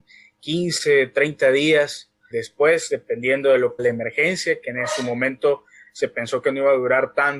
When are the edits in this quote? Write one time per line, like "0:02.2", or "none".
0:02.3
0:03.8